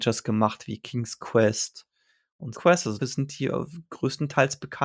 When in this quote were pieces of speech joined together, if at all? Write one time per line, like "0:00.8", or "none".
0:02.5
0:03.0

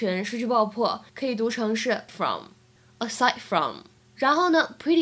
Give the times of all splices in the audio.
0:01.1
0:02.1
0:04.0

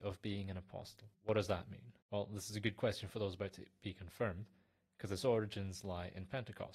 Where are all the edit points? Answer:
0:01.1
0:02.0

